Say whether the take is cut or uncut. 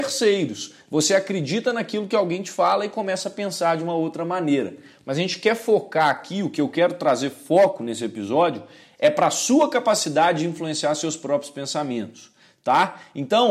uncut